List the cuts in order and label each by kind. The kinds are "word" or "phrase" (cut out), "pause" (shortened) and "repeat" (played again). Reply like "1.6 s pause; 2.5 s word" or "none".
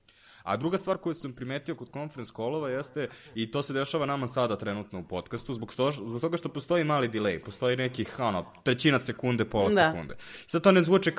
none